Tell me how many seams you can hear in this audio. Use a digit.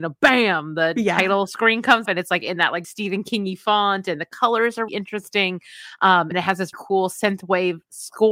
5